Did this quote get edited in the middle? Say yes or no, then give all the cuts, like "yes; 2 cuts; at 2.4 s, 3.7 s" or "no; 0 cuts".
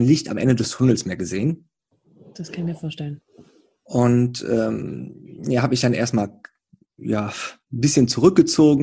no; 0 cuts